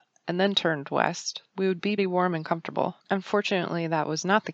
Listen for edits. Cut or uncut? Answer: cut